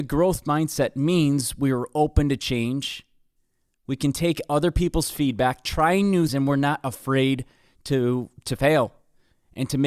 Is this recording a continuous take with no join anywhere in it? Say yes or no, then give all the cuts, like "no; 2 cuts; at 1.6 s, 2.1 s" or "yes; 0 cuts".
no; 1 cut; at 6.3 s